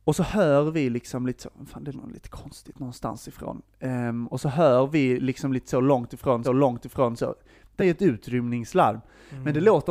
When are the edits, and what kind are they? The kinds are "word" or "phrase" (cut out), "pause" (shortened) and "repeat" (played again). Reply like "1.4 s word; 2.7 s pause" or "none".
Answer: 1.9 s word; 6.4 s repeat; 7.8 s word